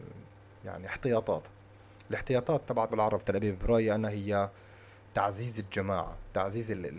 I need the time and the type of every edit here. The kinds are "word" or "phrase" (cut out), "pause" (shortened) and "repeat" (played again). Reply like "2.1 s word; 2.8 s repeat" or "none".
2.9 s word; 3.2 s word